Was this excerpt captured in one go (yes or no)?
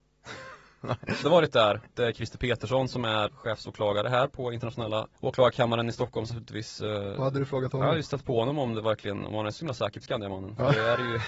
no